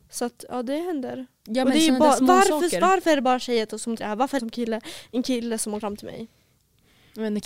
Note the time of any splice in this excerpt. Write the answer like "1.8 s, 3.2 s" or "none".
4.0 s, 4.4 s, 5.8 s